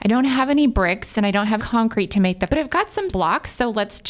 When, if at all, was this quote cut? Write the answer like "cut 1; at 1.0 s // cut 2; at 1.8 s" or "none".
cut 1; at 1.6 s // cut 2; at 2.5 s // cut 3; at 3.1 s